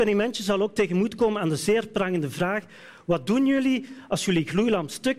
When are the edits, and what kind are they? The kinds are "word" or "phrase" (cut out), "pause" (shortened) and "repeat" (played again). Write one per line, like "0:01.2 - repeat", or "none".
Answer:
none

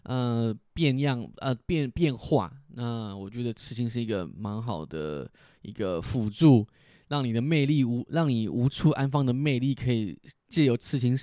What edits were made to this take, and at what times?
none

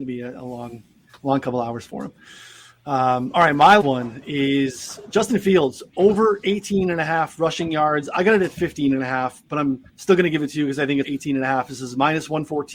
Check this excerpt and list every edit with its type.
0:03.8 - word
0:09.9 - pause
0:11.0 - phrase

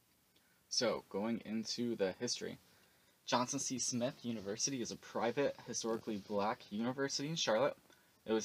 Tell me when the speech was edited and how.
none

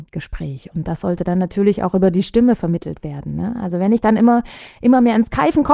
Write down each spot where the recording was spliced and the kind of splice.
none

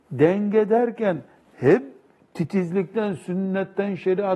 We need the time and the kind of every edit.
none

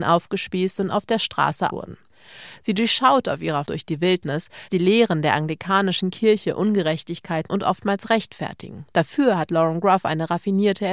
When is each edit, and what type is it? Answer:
0:01.7 - word
0:03.7 - word
0:04.7 - word
0:07.5 - word
0:08.9 - pause

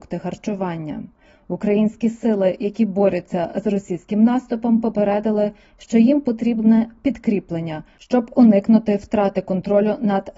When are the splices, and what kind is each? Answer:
none

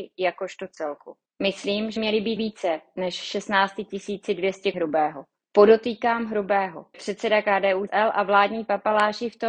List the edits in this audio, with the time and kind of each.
0:02.0 - word
0:02.4 - word
0:04.7 - word
0:06.9 - word
0:07.9 - word

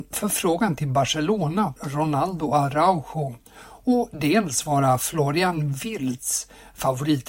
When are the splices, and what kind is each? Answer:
0:01.8 - word

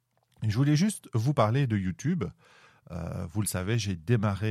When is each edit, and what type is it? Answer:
none

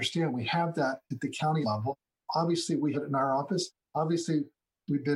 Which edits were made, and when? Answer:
0:01.6 - phrase
0:02.9 - word

